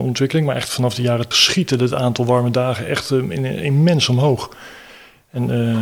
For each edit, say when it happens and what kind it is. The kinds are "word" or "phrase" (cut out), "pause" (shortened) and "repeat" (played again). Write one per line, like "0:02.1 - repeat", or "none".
0:01.3 - word